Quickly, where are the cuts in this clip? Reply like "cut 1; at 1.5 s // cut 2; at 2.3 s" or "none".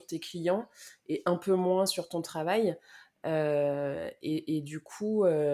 none